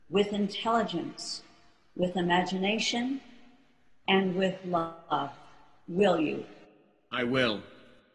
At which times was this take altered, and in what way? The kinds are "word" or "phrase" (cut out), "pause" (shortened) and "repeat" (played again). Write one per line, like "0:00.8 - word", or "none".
none